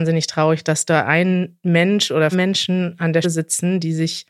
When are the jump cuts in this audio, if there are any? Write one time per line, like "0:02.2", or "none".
0:02.3
0:03.2